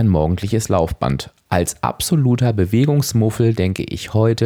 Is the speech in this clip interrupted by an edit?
no; 0 cuts

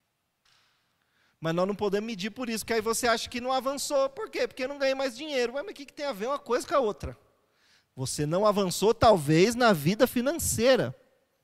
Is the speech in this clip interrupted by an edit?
no; 0 cuts

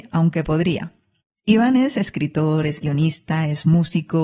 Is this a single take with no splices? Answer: yes; 0 cuts

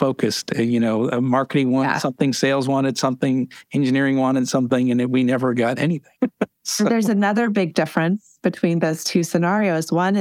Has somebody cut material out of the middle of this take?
yes; 1 cut; at 6.2 s

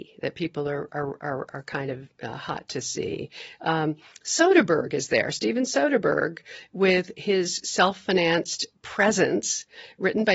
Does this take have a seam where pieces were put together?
no; 0 cuts

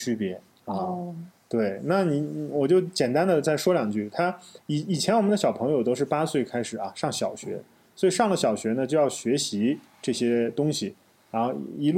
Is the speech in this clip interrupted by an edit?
no; 0 cuts

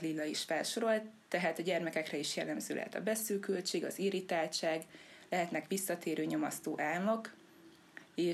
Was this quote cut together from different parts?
no; 0 cuts

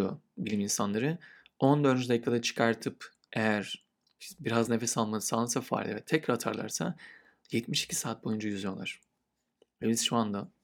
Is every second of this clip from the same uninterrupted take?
yes; 0 cuts

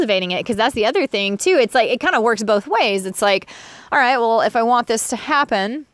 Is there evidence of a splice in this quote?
no; 0 cuts

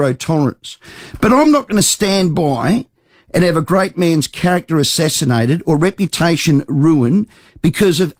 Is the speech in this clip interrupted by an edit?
no; 0 cuts

